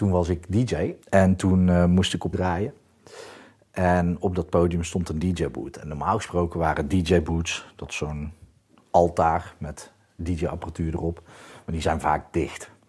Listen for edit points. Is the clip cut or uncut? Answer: cut